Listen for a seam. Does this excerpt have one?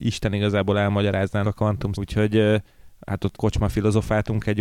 yes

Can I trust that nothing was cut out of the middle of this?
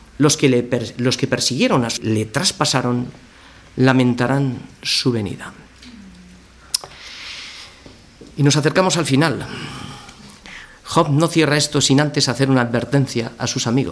no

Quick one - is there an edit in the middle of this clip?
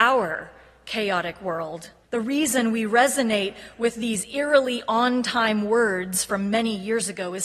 yes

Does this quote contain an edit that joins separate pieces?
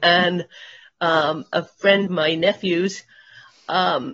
yes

